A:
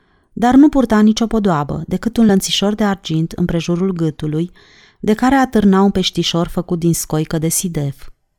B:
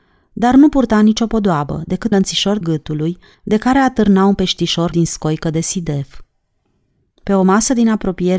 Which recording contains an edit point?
B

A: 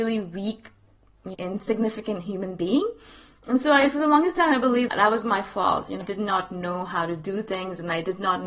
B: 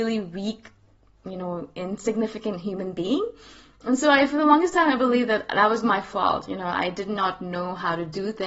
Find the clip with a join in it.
A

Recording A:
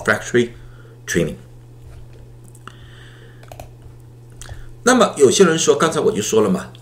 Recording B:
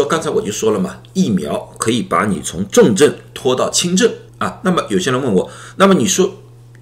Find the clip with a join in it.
B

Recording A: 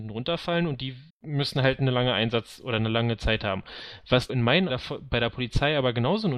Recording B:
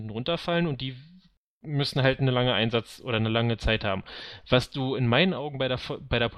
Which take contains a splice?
A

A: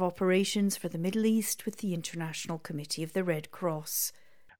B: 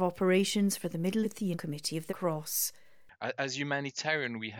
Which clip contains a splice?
B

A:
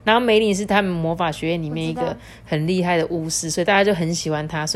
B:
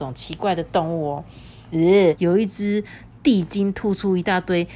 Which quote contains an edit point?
B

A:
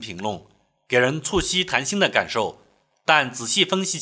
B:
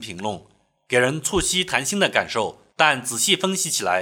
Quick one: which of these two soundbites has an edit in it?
B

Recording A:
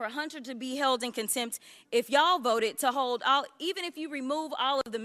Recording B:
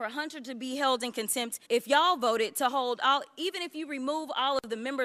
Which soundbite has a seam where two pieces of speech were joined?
B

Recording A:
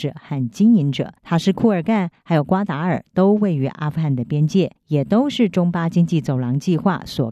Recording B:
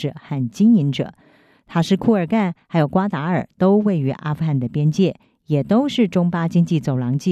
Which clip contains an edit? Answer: A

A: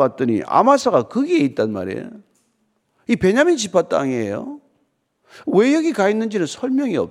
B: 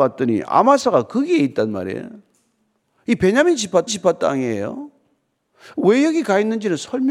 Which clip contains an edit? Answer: B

